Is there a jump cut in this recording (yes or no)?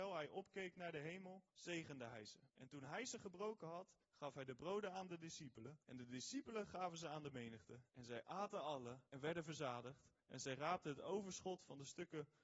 yes